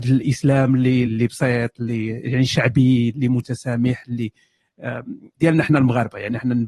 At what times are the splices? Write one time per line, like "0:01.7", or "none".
0:01.0
0:05.3